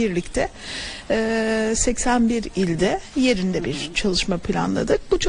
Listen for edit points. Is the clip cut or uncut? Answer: uncut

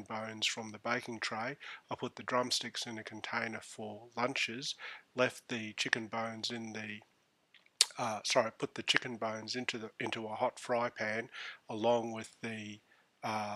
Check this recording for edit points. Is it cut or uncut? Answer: uncut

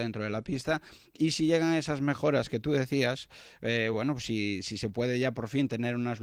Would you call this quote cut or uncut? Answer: uncut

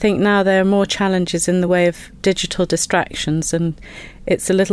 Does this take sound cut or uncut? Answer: uncut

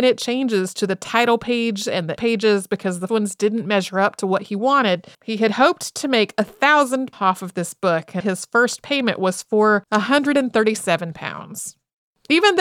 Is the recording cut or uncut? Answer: cut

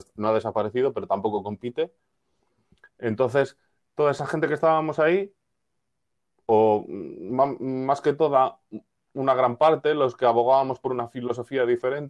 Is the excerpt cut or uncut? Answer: uncut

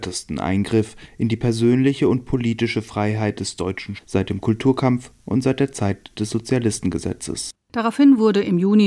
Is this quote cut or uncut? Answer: cut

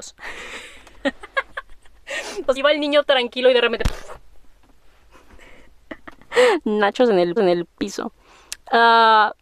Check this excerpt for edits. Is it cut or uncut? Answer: cut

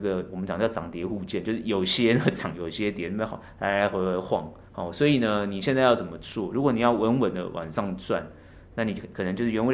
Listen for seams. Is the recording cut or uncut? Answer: cut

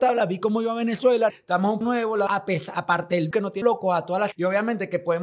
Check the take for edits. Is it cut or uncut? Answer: cut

